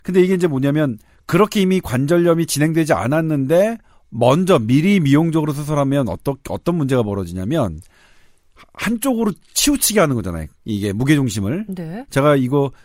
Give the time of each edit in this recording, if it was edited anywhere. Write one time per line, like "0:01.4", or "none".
none